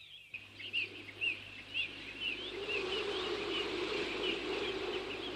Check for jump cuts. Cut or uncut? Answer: uncut